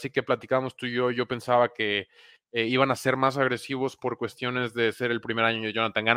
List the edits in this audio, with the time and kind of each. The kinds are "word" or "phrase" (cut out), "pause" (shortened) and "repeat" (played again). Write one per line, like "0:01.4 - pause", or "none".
none